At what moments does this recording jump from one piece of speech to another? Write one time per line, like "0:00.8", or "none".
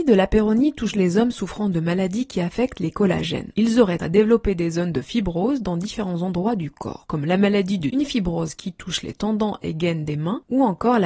0:00.9
0:04.0
0:07.9